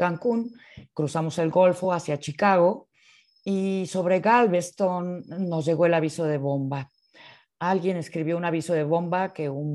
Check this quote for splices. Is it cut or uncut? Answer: uncut